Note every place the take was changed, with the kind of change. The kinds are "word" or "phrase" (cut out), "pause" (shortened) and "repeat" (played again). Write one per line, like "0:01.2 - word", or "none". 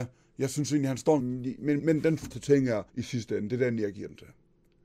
0:01.2 - phrase
0:01.8 - word
0:02.3 - word
0:02.9 - pause